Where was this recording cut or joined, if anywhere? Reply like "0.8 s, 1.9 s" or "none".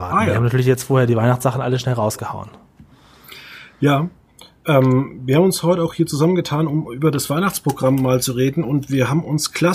none